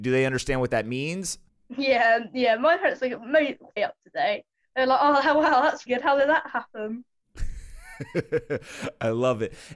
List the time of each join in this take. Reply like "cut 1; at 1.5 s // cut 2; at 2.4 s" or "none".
cut 1; at 1.5 s // cut 2; at 3.8 s // cut 3; at 5.9 s